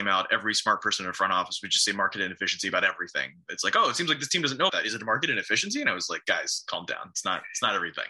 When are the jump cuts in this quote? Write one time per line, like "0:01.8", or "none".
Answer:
0:04.7